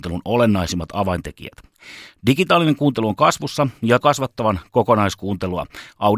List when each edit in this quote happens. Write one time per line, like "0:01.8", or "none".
0:04.0